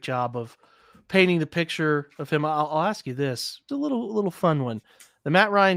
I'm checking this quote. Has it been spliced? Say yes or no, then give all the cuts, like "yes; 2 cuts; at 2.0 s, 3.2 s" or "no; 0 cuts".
yes; 1 cut; at 3.7 s